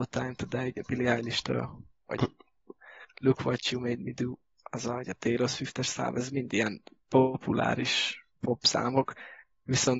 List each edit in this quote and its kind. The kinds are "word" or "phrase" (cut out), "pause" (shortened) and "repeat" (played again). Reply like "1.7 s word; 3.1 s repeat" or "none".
2.0 s pause; 8.3 s pause